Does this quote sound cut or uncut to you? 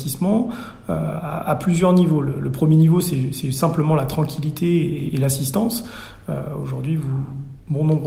uncut